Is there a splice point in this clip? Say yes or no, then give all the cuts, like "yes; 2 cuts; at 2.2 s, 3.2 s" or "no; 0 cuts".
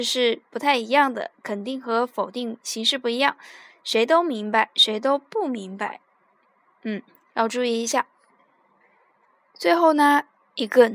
no; 0 cuts